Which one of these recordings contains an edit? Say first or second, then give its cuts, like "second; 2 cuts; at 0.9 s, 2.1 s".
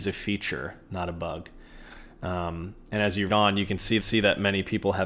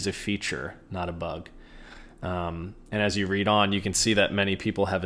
first; 2 cuts; at 3.3 s, 4.0 s